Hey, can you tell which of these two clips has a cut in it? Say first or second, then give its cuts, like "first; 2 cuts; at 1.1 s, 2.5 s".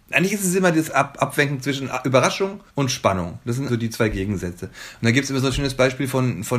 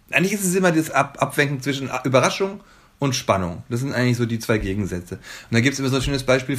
first; 2 cuts; at 2.7 s, 3.7 s